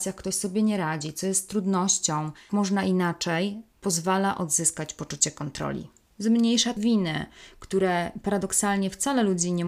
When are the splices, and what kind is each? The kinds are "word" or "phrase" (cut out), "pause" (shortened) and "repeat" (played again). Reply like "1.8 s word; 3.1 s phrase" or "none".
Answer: 2.5 s word; 6.8 s phrase